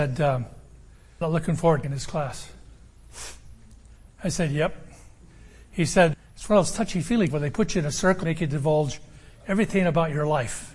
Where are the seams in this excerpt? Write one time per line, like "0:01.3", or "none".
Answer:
0:01.2
0:01.8
0:06.1
0:07.3
0:08.2